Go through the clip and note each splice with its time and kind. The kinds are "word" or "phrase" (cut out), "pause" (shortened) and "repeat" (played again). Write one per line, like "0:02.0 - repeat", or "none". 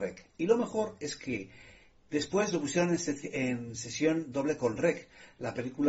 none